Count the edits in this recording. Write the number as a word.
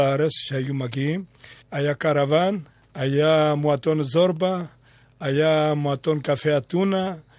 two